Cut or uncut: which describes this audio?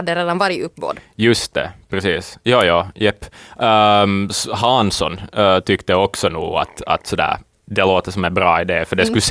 uncut